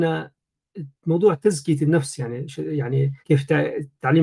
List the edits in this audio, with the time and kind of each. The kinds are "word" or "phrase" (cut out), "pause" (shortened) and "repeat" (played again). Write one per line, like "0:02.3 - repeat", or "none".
0:03.2 - pause

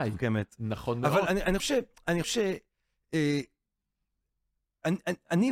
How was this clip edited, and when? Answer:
0:01.3 - word
0:01.6 - word
0:02.2 - word

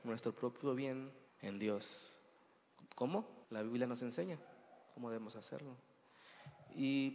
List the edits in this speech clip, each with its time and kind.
0:01.3 - pause
0:03.4 - pause
0:04.8 - pause

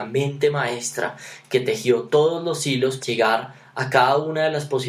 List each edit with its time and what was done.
0:03.0 - word

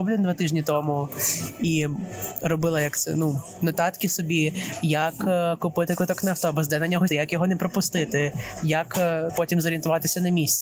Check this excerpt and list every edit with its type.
0:07.1 - word
0:09.3 - word

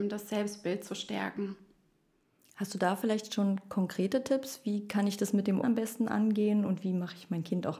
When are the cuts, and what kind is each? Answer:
0:05.6 - word

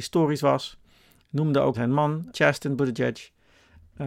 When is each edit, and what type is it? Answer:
0:01.7 - word
0:02.3 - word

